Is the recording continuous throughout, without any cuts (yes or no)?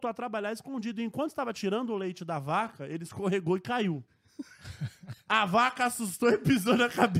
yes